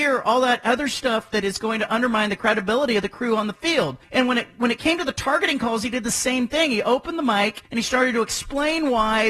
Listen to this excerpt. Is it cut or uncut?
cut